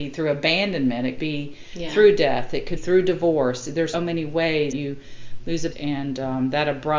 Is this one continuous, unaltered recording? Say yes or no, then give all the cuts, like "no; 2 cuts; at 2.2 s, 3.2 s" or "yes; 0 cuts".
no; 5 cuts; at 1.2 s, 2.8 s, 3.9 s, 4.7 s, 5.7 s